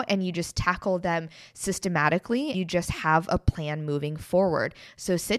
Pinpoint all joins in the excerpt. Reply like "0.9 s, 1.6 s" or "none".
2.5 s